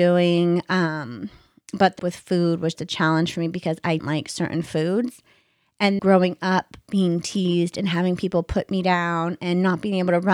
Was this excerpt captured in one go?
no; 4 cuts; at 2.0 s, 2.7 s, 4.0 s, 6.0 s

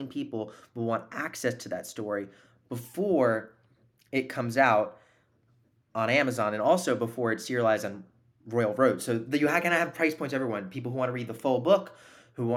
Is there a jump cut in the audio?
no; 0 cuts

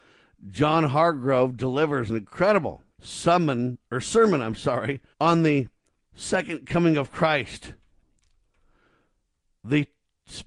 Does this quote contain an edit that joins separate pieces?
yes; 3 cuts; at 2.9 s, 5.1 s, 5.9 s

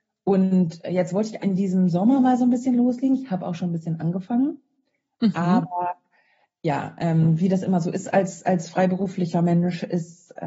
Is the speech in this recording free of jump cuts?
no; 1 cut; at 1.4 s

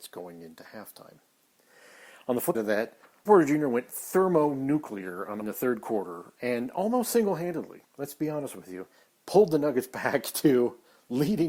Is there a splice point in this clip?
yes; 4 cuts; at 2.5 s, 3.3 s, 5.4 s, 7.8 s

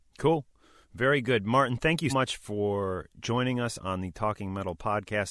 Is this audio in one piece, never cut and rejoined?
no; 1 cut; at 2.1 s

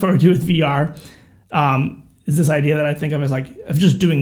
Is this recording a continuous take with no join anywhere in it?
yes; 0 cuts

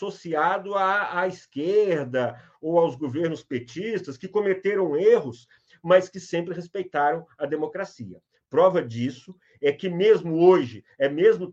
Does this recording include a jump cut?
no; 0 cuts

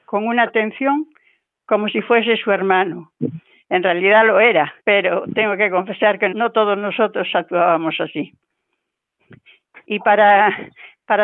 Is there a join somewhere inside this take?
yes; 2 cuts; at 4.8 s, 6.3 s

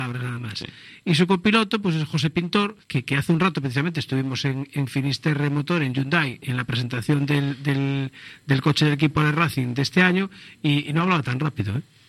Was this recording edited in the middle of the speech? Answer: yes; 1 cut; at 2.8 s

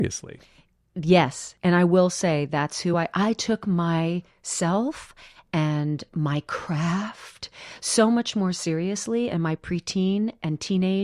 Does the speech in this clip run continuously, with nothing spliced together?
yes; 0 cuts

